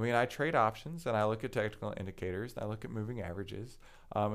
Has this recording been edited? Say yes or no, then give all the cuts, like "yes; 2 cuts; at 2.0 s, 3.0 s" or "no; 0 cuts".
no; 0 cuts